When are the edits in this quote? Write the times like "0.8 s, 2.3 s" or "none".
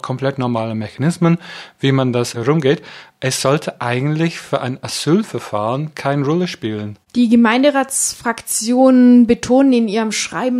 none